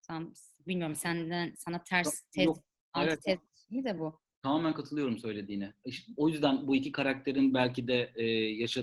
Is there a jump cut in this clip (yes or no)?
no